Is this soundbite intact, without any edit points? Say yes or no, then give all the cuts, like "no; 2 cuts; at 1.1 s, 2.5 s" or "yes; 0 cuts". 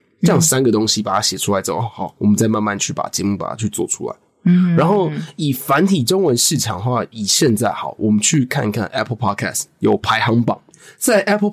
yes; 0 cuts